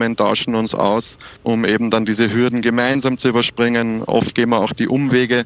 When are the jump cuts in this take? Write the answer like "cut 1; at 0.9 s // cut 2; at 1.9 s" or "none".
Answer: cut 1; at 1.4 s